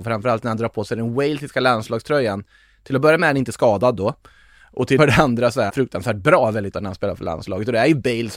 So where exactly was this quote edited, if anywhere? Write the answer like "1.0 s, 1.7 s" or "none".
5.0 s, 5.7 s, 6.7 s